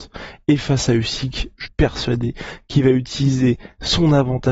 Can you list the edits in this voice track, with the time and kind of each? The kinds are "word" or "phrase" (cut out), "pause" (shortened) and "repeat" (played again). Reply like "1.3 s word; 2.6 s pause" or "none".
1.7 s word